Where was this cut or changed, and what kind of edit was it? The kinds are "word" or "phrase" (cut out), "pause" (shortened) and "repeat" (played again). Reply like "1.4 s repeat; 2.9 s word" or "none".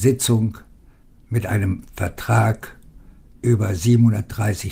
none